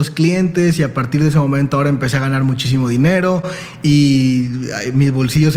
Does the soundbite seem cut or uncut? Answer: uncut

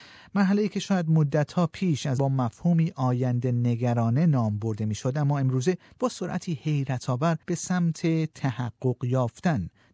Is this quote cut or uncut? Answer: cut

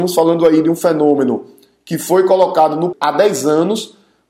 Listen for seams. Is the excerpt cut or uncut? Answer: cut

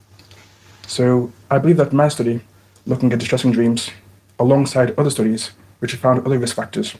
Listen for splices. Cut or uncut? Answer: uncut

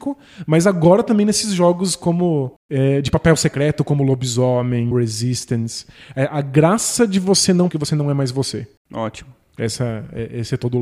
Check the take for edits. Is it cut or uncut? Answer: cut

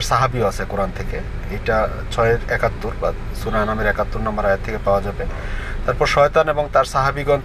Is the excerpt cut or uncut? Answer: uncut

